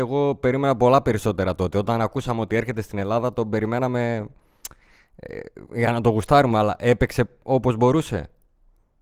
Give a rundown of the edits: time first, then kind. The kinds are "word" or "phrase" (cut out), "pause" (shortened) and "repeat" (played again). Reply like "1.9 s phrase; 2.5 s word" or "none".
none

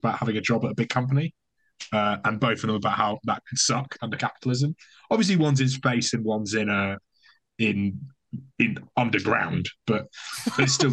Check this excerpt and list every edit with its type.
none

